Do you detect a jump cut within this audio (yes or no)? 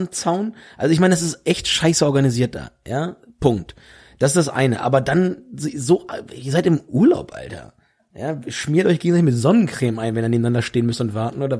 no